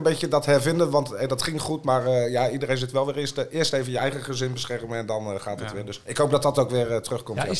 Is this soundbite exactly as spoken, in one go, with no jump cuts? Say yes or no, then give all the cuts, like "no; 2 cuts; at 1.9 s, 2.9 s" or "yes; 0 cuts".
yes; 0 cuts